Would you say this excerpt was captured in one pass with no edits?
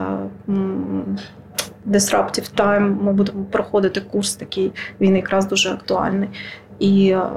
yes; 0 cuts

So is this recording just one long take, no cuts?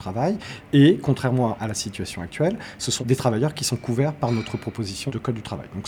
yes; 0 cuts

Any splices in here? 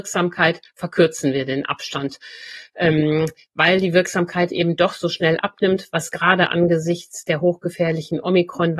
no; 0 cuts

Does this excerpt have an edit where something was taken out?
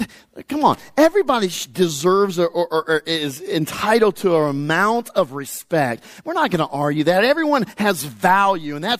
no; 0 cuts

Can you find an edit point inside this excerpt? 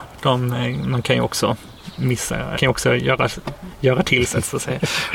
yes; 1 cut; at 2.6 s

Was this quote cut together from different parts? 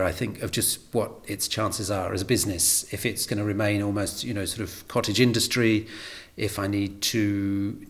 yes; 1 cut; at 3.3 s

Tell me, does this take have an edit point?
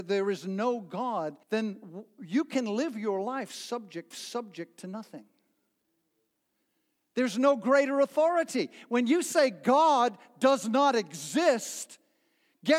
yes; 2 cuts; at 1.4 s, 4.1 s

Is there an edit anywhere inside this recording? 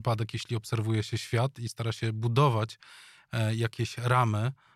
no; 0 cuts

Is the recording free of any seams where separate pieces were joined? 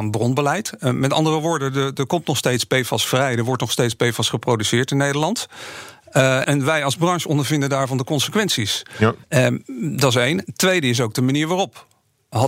no; 2 cuts; at 6.4 s, 9.2 s

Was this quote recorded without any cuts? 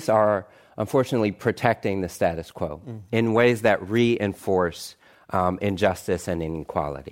yes; 0 cuts

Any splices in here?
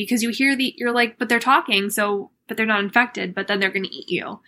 no; 0 cuts

